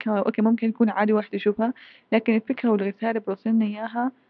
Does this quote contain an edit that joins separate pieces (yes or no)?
no